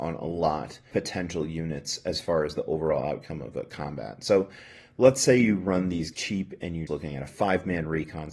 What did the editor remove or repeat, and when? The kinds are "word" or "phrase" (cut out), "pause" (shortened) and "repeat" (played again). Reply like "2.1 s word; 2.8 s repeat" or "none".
0.9 s word; 6.1 s word; 6.9 s word